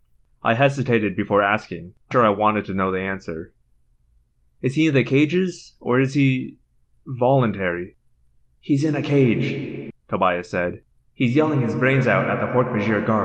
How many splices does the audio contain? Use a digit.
2